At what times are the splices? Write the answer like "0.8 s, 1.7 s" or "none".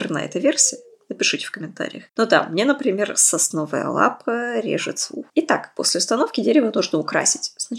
2.1 s, 5.3 s